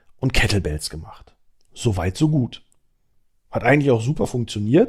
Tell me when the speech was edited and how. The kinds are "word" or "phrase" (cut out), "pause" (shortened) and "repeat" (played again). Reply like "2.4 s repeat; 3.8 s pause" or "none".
1.5 s pause